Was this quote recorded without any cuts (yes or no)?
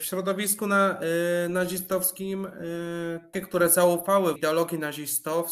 no